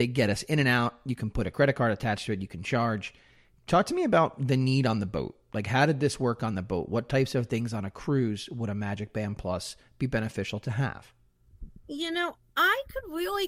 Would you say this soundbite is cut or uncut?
uncut